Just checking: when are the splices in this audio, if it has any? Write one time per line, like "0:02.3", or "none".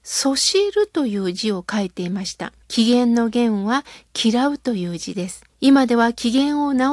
0:02.6
0:05.5